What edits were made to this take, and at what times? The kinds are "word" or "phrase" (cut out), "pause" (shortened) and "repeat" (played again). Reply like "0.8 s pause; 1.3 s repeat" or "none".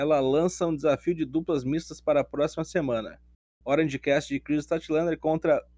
none